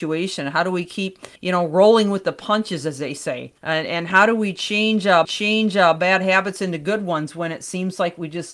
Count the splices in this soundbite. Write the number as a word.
three